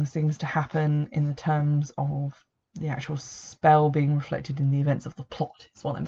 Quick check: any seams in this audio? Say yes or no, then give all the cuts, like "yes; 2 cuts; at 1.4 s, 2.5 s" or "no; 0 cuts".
no; 0 cuts